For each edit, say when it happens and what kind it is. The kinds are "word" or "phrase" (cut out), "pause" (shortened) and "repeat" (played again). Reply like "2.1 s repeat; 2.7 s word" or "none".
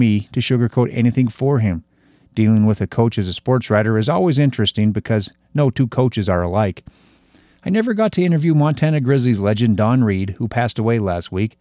none